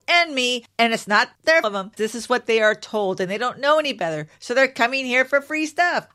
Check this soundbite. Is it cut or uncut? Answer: cut